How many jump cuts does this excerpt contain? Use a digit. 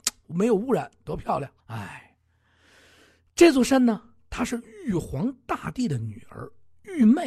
1